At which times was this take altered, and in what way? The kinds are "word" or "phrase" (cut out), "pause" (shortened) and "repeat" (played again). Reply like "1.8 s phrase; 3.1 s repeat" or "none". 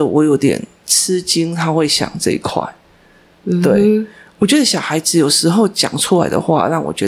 none